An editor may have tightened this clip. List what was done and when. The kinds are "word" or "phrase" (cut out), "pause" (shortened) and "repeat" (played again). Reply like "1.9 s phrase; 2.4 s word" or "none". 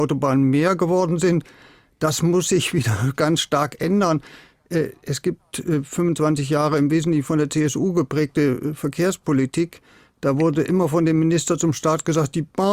none